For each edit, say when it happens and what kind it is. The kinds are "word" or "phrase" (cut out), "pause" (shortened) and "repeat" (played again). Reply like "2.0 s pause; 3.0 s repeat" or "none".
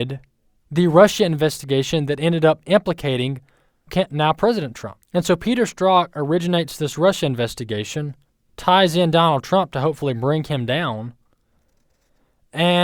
3.9 s word; 5.0 s pause; 8.3 s pause